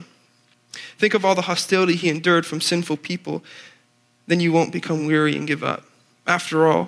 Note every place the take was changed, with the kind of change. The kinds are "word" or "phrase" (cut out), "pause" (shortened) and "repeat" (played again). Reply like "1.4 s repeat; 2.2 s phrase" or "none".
none